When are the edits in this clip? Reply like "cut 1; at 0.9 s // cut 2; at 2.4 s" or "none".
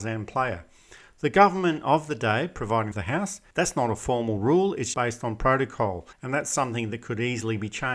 cut 1; at 2.9 s // cut 2; at 3.5 s // cut 3; at 4.9 s // cut 4; at 6.1 s